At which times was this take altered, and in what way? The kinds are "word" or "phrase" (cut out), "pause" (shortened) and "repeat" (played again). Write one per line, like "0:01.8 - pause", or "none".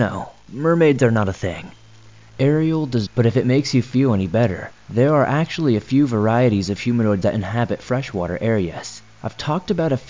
0:03.1 - phrase
0:07.2 - word

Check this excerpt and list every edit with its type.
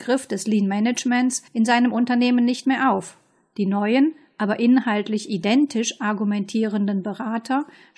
0:01.5 - pause

